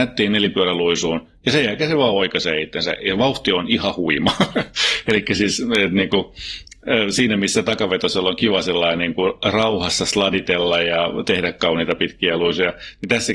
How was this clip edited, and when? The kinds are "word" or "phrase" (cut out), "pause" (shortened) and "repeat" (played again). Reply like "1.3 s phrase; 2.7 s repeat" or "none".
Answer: none